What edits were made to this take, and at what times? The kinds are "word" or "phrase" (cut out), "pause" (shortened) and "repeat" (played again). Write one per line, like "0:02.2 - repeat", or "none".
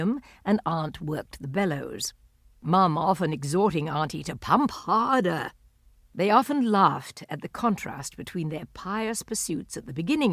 none